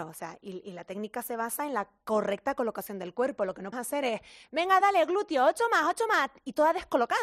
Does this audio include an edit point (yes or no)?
yes